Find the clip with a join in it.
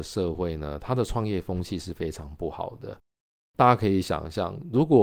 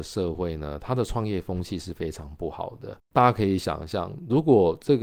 second; 1 cut; at 3.0 s

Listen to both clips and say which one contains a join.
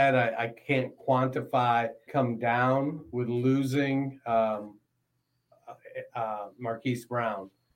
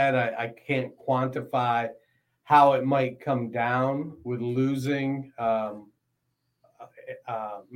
first; 1 cut; at 2.1 s

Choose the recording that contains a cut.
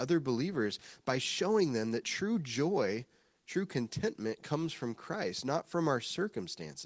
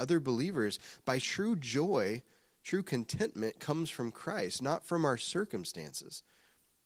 second; 1 cut; at 1.2 s

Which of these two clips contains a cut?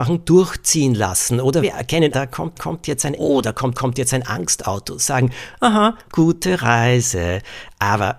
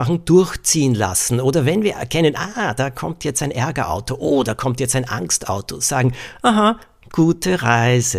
first; 6 cuts; at 1.6 s, 2.1 s, 2.5 s, 3.1 s, 3.7 s, 6.1 s

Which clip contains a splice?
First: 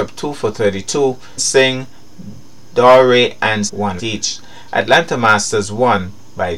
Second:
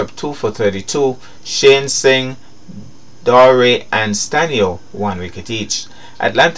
first; 3 cuts; at 1.4 s, 3.7 s, 4.0 s

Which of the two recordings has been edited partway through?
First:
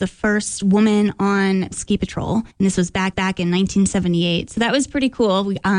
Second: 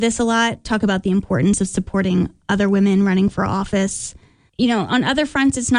first; 3 cuts; at 1.7 s, 2.5 s, 3.1 s

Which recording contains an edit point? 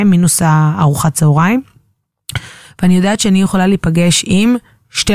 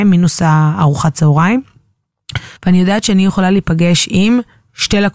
second; 1 cut; at 2.6 s

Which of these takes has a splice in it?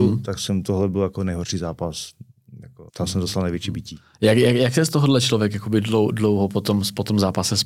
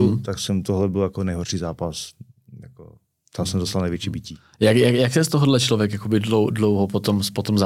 first; 1 cut; at 2.9 s

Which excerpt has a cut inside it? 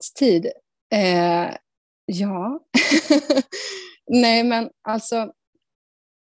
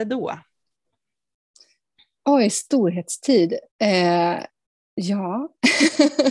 second; 2 cuts; at 2.5 s, 3.7 s

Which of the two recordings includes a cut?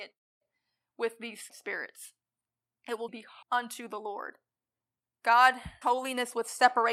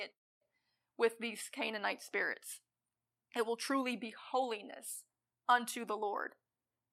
first; 4 cuts; at 1.5 s, 3.1 s, 3.4 s, 5.8 s

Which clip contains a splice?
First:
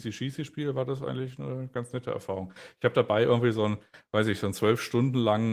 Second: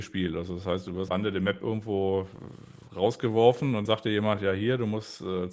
second; 2 cuts; at 1.1 s, 3.8 s

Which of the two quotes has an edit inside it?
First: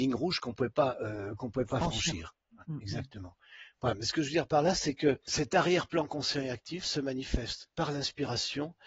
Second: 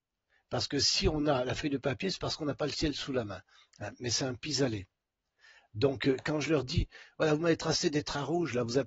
first; 1 cut; at 7.7 s

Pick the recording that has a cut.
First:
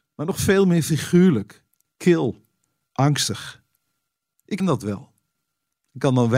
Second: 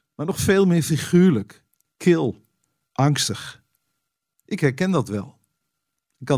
first; 1 cut; at 4.6 s

